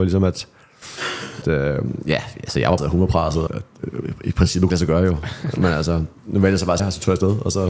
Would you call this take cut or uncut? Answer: cut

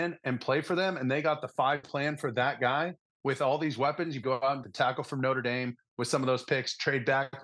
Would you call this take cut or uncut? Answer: cut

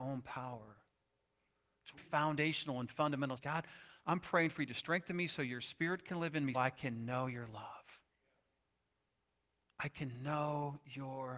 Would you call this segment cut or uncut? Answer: cut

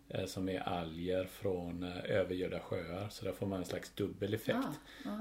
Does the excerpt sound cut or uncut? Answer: uncut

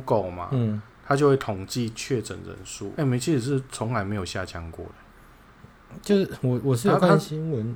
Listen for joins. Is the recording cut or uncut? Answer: cut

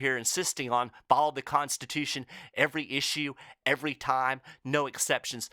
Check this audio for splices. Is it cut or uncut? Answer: uncut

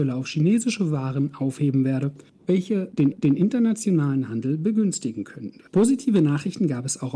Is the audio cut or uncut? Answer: cut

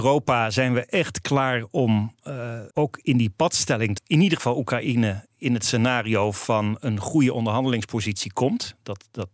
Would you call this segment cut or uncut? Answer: cut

